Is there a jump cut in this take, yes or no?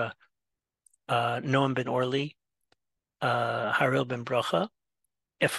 yes